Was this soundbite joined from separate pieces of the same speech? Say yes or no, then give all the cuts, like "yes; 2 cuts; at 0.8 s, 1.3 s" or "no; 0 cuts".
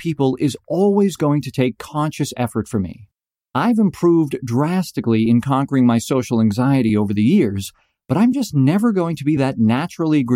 no; 0 cuts